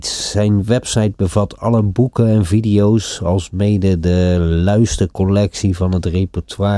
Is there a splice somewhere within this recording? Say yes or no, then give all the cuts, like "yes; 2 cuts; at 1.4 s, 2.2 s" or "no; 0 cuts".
no; 0 cuts